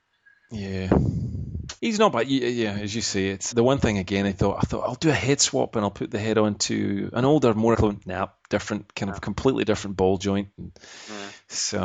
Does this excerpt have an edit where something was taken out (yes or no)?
yes